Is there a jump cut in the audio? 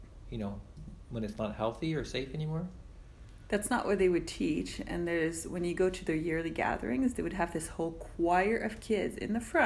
no; 0 cuts

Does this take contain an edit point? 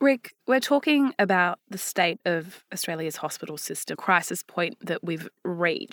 yes; 1 cut; at 3.9 s

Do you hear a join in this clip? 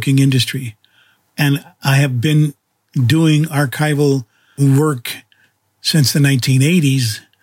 no; 0 cuts

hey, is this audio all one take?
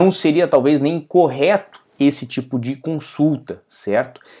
yes; 0 cuts

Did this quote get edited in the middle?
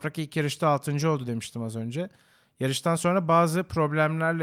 no; 0 cuts

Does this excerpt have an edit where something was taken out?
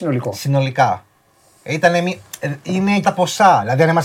yes; 1 cut; at 3.0 s

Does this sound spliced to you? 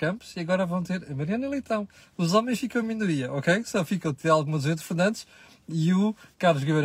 no; 0 cuts

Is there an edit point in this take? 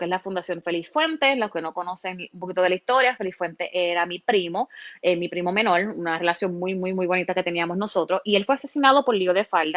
no; 0 cuts

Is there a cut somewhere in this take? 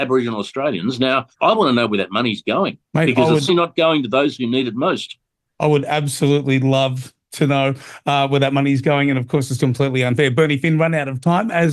yes; 4 cuts; at 1.3 s, 2.8 s, 3.5 s, 9.6 s

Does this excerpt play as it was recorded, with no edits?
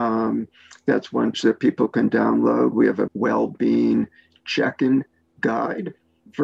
no; 2 cuts; at 1.3 s, 3.1 s

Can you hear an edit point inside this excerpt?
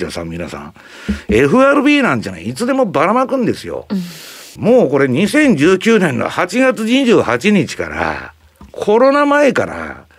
yes; 1 cut; at 4.6 s

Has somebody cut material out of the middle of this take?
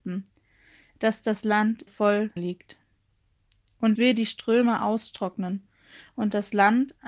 yes; 3 cuts; at 1.9 s, 2.4 s, 4.0 s

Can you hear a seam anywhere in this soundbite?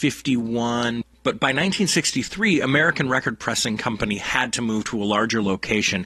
no; 0 cuts

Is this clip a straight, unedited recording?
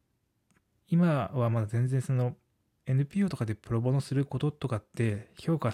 yes; 0 cuts

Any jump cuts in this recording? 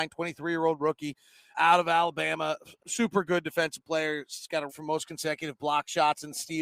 yes; 3 cuts; at 1.5 s, 2.8 s, 4.7 s

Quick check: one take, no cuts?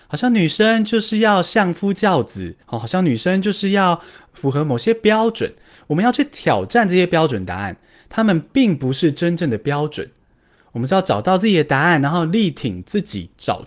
no; 1 cut; at 2.6 s

